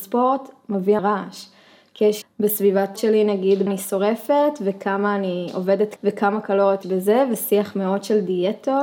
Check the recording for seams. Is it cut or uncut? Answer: cut